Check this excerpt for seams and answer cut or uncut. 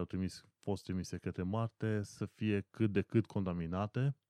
uncut